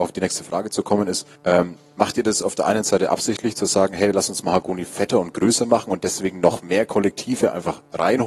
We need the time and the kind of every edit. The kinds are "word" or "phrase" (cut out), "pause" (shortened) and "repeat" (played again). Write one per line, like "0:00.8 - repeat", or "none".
0:01.3 - pause

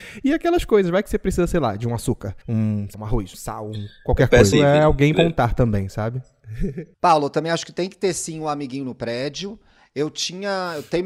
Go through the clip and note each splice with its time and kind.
0:02.4 - pause
0:02.9 - word
0:03.3 - word
0:04.5 - phrase
0:05.1 - word
0:06.9 - pause

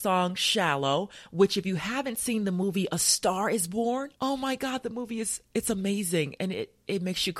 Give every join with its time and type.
0:04.2 - pause

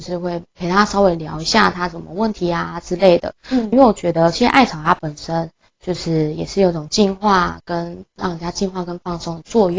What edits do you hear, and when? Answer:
0:03.7 - word

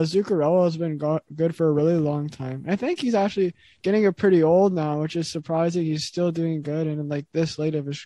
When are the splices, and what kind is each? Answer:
none

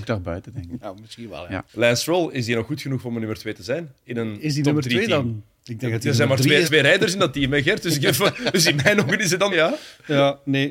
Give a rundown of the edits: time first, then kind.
0:01.7 - pause
0:04.0 - pause
0:06.6 - phrase
0:09.5 - phrase

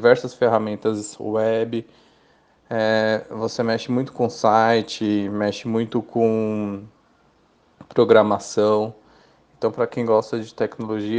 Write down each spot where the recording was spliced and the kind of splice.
none

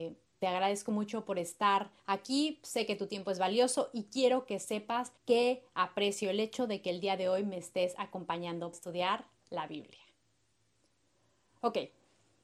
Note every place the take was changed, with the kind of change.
0:02.0 - pause
0:05.2 - pause
0:08.7 - word

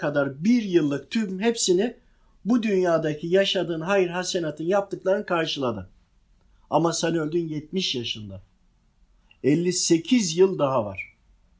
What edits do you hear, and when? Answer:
none

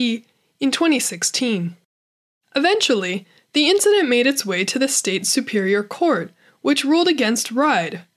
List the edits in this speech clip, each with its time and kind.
none

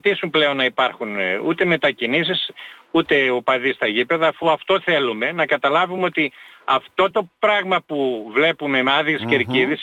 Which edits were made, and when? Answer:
none

